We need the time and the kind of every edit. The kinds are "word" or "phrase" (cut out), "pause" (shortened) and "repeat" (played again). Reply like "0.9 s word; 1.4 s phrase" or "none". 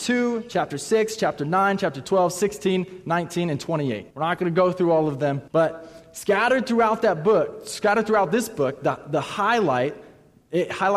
4.1 s pause; 5.5 s pause